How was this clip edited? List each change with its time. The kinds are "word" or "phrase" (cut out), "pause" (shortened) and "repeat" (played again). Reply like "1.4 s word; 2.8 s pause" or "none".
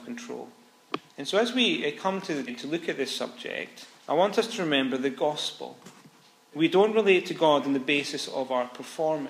1.1 s pause; 2.5 s word; 4.0 s pause; 6.5 s phrase